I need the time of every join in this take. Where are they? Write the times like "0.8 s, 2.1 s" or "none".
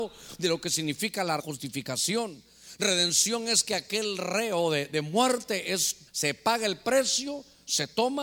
1.4 s, 6.1 s